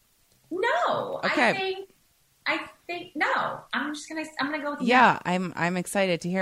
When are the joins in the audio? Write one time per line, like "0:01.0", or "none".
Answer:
none